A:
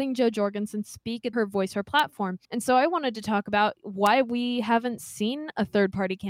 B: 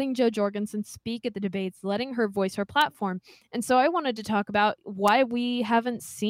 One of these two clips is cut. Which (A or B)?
A